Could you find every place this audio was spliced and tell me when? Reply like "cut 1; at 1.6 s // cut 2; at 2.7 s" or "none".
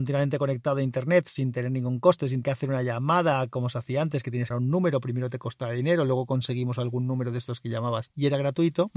cut 1; at 2.4 s // cut 2; at 4.5 s